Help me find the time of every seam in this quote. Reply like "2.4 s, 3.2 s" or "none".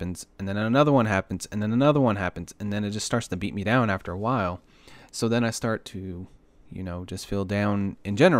none